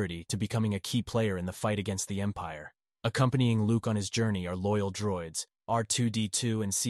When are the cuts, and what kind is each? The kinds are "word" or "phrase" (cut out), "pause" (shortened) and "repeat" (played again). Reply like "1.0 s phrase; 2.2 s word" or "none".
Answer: none

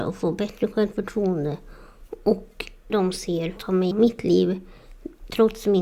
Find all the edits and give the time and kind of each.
2.9 s word; 3.6 s word; 3.9 s word

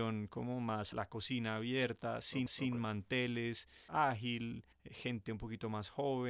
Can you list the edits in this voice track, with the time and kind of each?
0.9 s word; 2.5 s repeat; 3.9 s phrase; 4.7 s pause

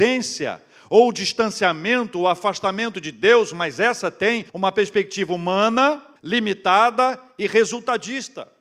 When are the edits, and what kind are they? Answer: 4.5 s pause; 6.2 s pause

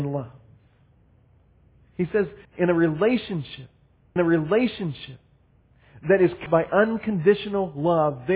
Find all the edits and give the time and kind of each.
2.4 s pause; 4.2 s repeat; 6.5 s word

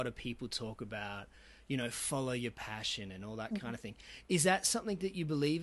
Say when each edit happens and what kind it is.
none

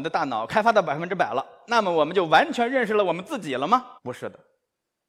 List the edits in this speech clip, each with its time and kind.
4.0 s pause

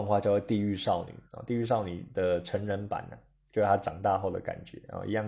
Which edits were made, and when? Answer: 1.2 s pause

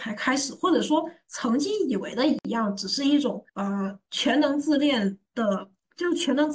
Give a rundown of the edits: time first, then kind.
3.5 s pause; 5.3 s pause

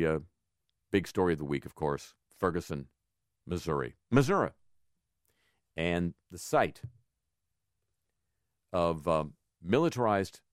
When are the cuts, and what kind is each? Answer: 2.2 s pause; 4.0 s pause; 6.2 s pause

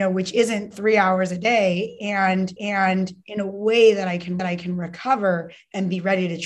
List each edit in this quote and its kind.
2.6 s repeat; 4.4 s repeat

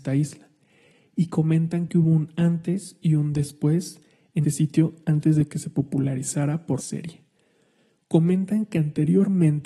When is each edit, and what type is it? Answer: 4.4 s word; 6.8 s word

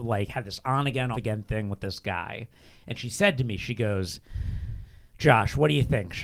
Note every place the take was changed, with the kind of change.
1.1 s word

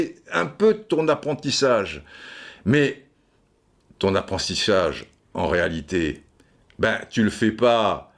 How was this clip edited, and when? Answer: none

